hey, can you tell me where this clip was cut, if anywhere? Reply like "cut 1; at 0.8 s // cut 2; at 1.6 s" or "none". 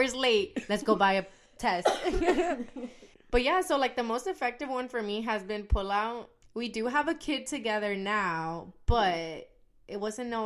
none